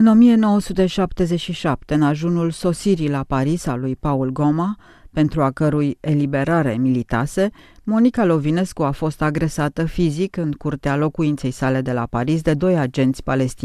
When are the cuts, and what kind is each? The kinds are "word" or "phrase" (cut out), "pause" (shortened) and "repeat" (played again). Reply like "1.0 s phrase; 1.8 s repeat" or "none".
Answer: none